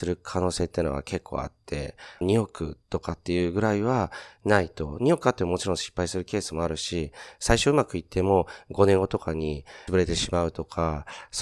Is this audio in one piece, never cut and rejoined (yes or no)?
no